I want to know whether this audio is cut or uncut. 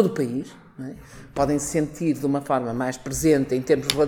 uncut